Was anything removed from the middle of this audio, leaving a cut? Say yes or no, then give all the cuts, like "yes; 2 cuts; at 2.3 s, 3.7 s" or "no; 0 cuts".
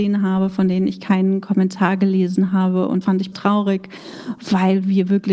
yes; 2 cuts; at 3.0 s, 3.3 s